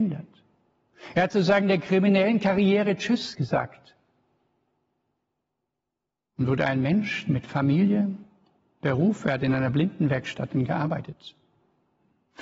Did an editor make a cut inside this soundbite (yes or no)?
no